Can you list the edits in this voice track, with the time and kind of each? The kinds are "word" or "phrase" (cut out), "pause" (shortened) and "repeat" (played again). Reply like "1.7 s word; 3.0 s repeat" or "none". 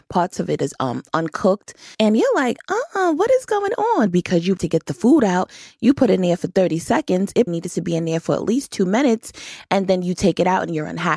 1.9 s pause; 4.6 s phrase; 7.5 s word